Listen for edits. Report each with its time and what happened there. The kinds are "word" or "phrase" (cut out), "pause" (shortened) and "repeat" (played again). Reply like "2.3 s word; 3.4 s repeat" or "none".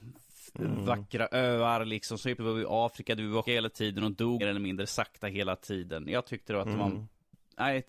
2.4 s word; 3.4 s word; 4.4 s word